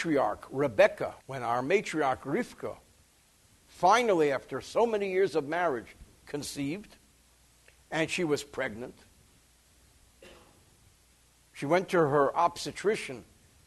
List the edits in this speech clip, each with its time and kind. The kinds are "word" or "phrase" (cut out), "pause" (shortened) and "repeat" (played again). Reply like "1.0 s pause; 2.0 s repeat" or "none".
1.2 s pause